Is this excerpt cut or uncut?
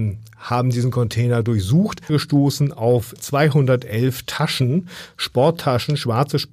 cut